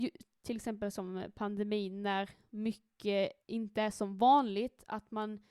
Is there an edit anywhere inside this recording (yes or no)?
yes